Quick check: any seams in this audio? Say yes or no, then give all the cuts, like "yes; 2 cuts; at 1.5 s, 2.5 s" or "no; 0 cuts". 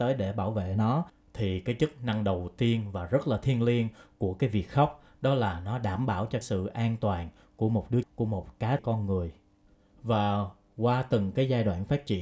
yes; 3 cuts; at 6.4 s, 8.0 s, 8.8 s